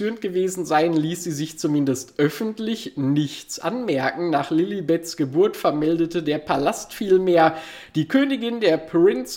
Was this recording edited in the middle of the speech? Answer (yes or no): no